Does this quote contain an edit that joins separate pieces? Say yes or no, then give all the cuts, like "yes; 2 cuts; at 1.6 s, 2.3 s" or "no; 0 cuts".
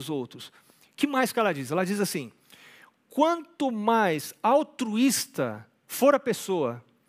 no; 0 cuts